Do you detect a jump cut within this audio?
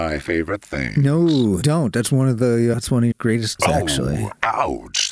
yes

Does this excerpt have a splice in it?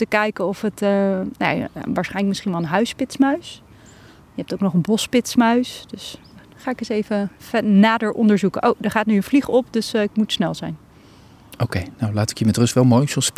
no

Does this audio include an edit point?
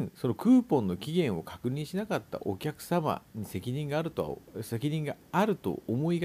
no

